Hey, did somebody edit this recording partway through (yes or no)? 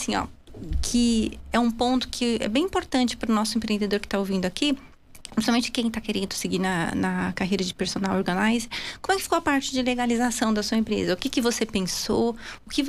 no